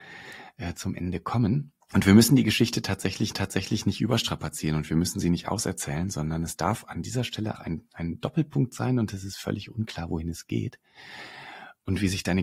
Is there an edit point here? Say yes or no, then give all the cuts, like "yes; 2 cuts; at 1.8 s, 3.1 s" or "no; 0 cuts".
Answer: yes; 3 cuts; at 1.8 s, 3.3 s, 7.6 s